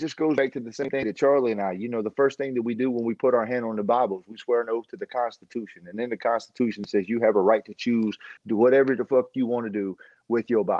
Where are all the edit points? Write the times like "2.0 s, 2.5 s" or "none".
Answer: 8.4 s

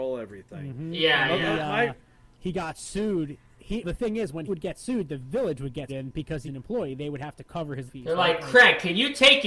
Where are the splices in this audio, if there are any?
3.8 s, 4.5 s, 5.9 s, 6.5 s, 7.9 s

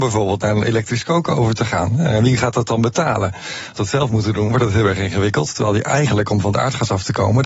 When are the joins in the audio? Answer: 3.8 s

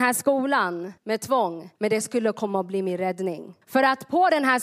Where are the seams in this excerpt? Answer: 1.0 s, 1.8 s, 3.6 s

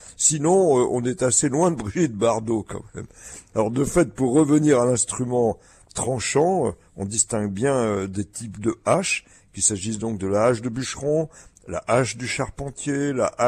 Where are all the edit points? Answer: none

